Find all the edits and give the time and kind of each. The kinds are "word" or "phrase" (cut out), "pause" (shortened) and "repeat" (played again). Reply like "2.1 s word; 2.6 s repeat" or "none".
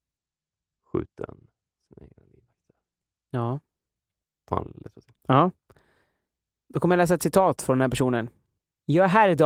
none